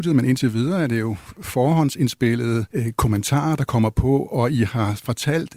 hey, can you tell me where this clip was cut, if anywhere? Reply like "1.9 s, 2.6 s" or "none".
2.7 s